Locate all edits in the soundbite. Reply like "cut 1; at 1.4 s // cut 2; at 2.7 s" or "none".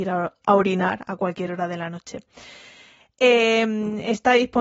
none